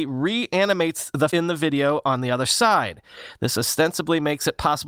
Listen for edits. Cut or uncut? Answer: cut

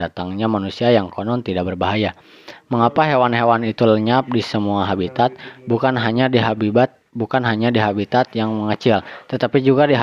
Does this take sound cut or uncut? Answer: cut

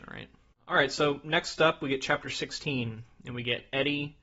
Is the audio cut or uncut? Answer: uncut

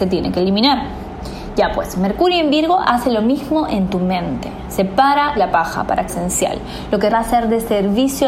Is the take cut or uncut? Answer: cut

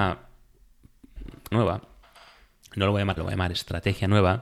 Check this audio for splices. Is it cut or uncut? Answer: cut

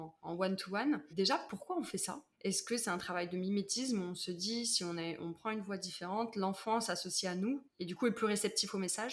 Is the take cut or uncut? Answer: cut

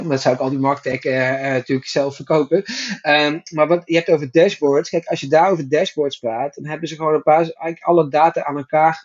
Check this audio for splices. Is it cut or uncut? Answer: uncut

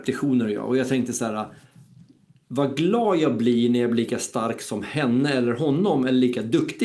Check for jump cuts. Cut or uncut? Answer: uncut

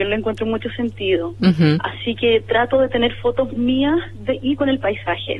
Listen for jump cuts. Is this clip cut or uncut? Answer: uncut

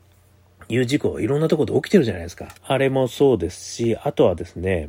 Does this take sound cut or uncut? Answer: cut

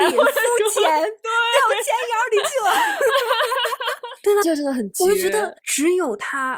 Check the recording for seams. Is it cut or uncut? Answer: cut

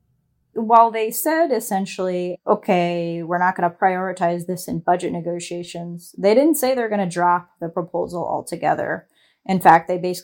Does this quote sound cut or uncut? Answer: uncut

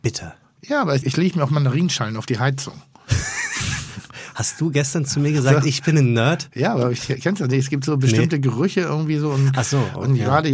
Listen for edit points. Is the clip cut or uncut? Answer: cut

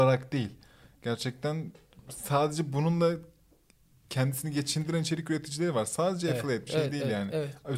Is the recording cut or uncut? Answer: cut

